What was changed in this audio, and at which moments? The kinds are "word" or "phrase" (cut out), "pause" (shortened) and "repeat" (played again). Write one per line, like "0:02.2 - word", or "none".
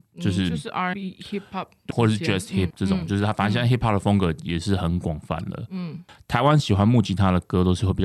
0:00.9 - word
0:01.9 - word
0:02.7 - word